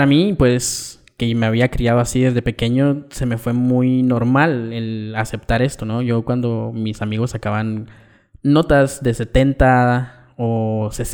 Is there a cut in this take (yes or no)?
no